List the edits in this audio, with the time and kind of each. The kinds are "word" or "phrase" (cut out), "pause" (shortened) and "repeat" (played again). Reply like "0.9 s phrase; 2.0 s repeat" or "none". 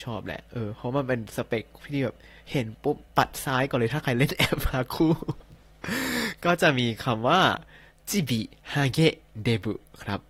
3.1 s pause